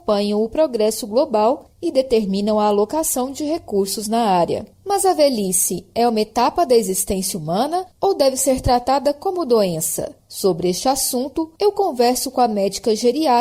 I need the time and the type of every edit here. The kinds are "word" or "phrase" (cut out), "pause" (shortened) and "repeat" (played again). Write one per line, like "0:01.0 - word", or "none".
0:04.7 - pause
0:07.9 - pause
0:10.2 - pause
0:11.6 - pause